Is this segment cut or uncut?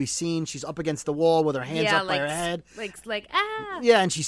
uncut